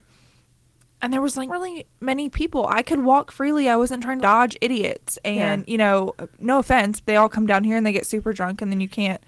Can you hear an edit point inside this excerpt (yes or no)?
yes